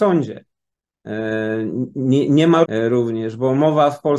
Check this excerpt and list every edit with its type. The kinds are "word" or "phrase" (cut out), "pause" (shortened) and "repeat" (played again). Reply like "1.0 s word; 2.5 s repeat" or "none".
2.6 s word